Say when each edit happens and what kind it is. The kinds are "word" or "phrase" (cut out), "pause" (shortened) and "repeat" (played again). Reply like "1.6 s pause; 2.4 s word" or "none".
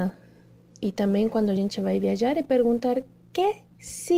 none